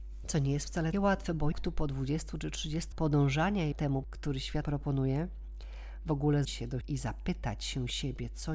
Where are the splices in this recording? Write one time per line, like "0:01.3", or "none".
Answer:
0:00.9
0:01.5
0:02.9
0:03.7
0:04.0
0:04.6
0:06.4
0:06.8